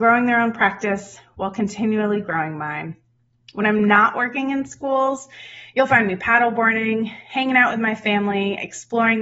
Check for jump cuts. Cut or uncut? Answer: uncut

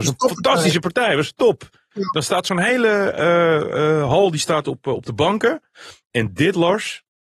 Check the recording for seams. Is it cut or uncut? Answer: uncut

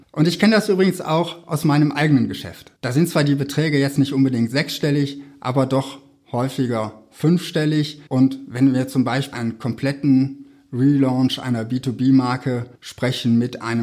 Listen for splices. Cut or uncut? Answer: cut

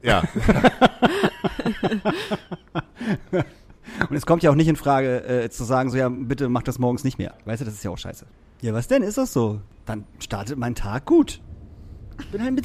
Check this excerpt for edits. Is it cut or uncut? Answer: uncut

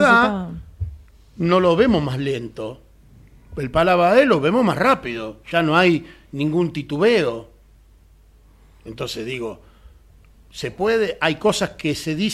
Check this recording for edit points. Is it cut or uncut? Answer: uncut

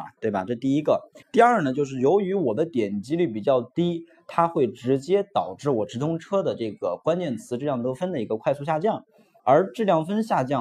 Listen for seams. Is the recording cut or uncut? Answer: cut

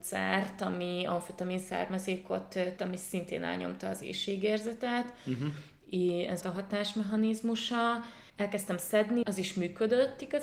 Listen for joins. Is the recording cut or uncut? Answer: cut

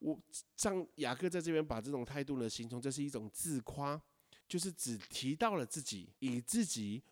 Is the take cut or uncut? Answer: cut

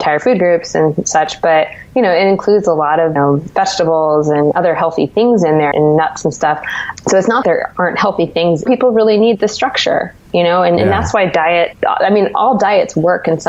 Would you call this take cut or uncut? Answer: cut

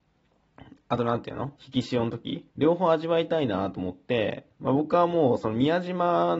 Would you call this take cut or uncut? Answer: cut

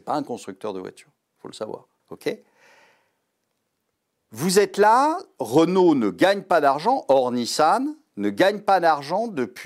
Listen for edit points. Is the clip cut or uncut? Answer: cut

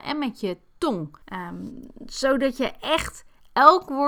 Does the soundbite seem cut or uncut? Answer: cut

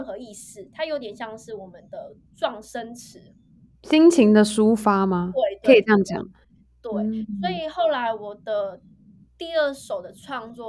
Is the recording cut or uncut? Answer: uncut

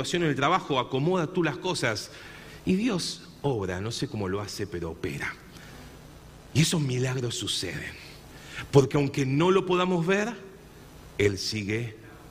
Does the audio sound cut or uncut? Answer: uncut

